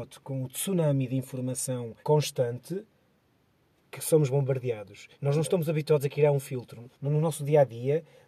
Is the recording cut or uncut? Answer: cut